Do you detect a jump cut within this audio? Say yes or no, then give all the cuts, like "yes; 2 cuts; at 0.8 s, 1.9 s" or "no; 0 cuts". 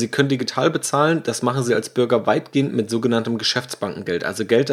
no; 0 cuts